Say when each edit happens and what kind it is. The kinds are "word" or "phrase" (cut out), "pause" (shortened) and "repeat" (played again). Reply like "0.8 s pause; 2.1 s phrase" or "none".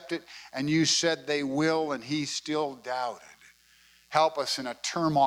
none